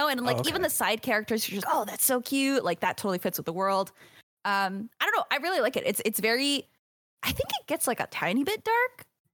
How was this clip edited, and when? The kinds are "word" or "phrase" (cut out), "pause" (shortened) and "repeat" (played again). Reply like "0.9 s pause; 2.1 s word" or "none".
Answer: 1.6 s word